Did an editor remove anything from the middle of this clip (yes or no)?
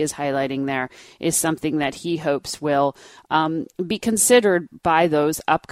no